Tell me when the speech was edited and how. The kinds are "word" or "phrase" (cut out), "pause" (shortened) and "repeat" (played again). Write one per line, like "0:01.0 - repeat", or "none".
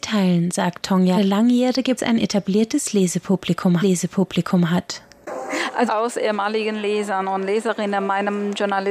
0:01.2 - phrase
0:02.0 - phrase
0:03.8 - repeat
0:05.9 - phrase